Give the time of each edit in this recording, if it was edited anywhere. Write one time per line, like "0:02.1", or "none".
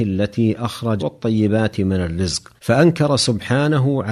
0:01.0
0:02.6